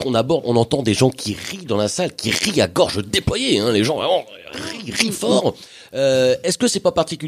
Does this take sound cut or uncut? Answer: uncut